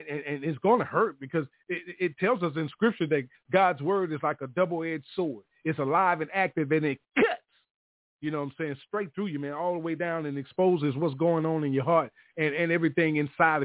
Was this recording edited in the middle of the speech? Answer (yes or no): no